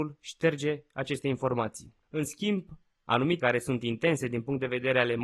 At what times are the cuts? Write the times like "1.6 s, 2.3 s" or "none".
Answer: 2.0 s, 3.4 s

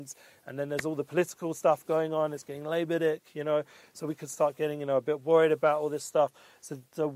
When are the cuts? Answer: none

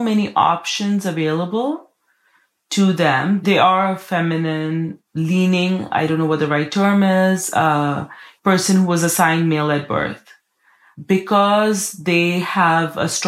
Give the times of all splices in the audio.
none

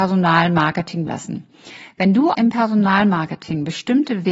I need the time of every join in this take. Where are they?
1.1 s, 2.3 s

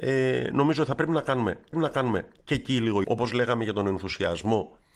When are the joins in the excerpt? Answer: 1.7 s, 3.0 s

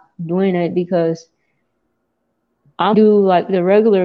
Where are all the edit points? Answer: 2.9 s

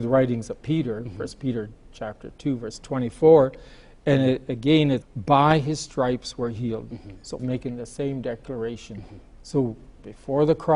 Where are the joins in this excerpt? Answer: 5.0 s, 7.4 s

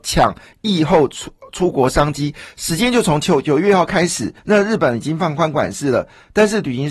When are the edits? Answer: 4.4 s

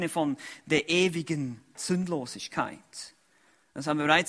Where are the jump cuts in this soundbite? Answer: 1.7 s

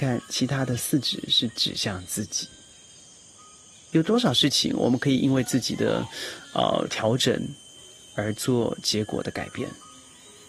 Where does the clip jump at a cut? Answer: none

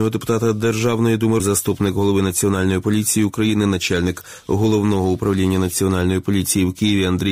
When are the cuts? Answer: 1.4 s

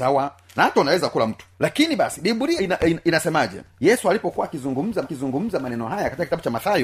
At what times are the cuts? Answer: 1.5 s, 2.6 s, 3.7 s, 5.0 s

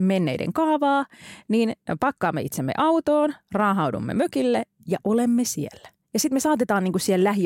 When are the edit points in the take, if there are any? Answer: none

